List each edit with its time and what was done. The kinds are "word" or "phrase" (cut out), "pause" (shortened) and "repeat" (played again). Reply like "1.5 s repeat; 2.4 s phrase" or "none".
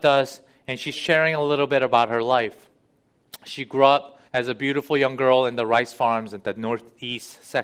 0.9 s word; 4.3 s pause